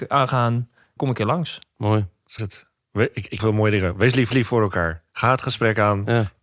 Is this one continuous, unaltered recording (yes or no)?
no